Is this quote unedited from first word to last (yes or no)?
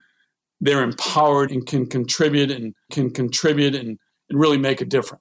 no